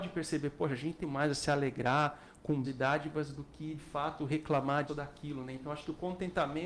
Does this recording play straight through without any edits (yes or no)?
no